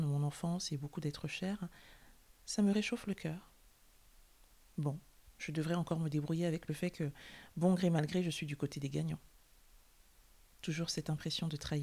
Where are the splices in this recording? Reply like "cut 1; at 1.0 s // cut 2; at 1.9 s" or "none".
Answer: none